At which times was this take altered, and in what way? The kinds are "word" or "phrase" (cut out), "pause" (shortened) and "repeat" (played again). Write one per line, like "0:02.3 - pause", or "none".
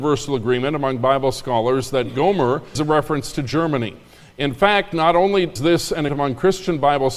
0:02.8 - word
0:05.6 - word
0:06.1 - word